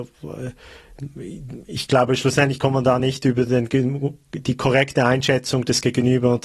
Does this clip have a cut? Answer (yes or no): no